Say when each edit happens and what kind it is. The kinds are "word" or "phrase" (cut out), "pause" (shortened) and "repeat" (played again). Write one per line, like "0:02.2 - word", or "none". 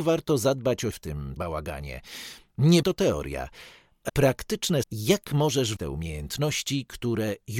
0:00.9 - word
0:01.4 - word
0:02.8 - word
0:04.1 - word
0:04.8 - word
0:05.8 - word